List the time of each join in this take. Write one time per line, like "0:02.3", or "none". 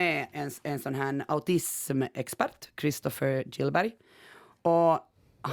none